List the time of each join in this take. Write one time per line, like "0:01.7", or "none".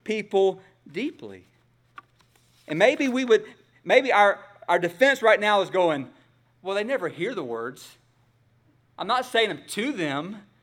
none